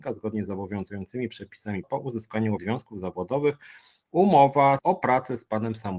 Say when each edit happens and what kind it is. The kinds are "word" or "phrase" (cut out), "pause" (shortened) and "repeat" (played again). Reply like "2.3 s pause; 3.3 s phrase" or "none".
1.8 s word; 2.6 s word; 4.8 s word